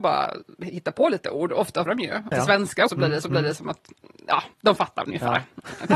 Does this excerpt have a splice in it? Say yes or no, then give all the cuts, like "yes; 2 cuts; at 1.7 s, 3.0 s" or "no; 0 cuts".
yes; 5 cuts; at 1.9 s, 2.3 s, 2.9 s, 3.2 s, 4.5 s